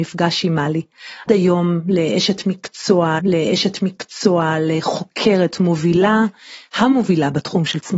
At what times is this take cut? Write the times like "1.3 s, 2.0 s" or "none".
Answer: 1.3 s, 3.2 s